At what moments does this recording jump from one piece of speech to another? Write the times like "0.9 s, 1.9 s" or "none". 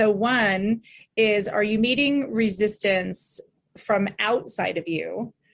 none